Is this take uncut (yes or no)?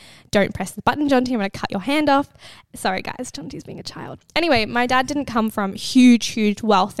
yes